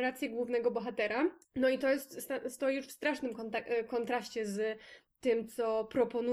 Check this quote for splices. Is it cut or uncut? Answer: cut